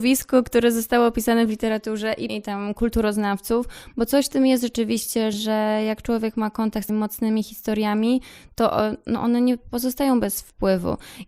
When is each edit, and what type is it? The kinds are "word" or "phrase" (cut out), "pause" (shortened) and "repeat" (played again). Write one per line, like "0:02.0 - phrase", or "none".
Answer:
0:02.3 - word
0:05.3 - word
0:06.9 - word